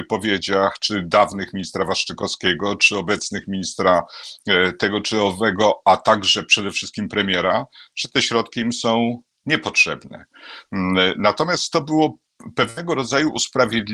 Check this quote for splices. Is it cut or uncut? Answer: uncut